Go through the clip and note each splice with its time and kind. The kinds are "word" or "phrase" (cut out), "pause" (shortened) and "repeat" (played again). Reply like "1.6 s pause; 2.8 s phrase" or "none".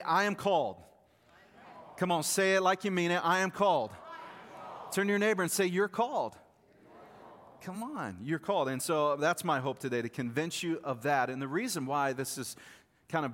none